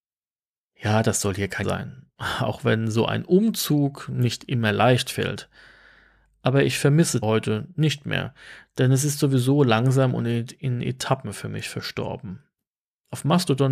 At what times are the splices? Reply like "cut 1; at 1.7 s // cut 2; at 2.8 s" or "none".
cut 1; at 1.6 s // cut 2; at 2.1 s // cut 3; at 7.2 s

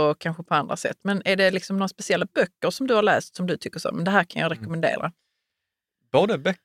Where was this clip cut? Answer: none

